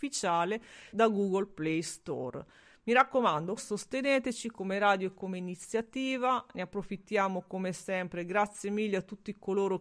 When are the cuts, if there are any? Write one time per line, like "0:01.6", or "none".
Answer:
0:00.9
0:03.6